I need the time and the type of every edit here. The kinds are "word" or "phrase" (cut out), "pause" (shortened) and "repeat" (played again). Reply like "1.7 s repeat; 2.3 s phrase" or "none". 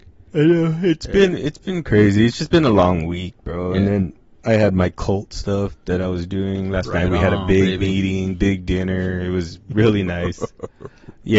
none